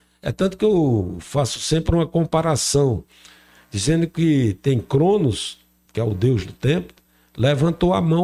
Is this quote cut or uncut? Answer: uncut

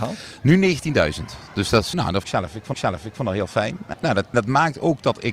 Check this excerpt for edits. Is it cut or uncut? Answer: cut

